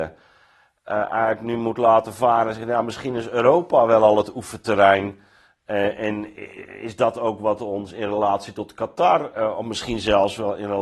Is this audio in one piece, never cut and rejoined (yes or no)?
yes